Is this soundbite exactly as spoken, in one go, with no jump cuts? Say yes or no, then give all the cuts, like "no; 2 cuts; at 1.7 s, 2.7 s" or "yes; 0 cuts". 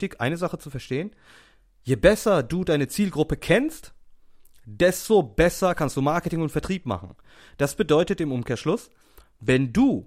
yes; 0 cuts